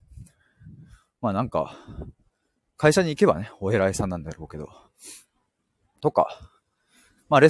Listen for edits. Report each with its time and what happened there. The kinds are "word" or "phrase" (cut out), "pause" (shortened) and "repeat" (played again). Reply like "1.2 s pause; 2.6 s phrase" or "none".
none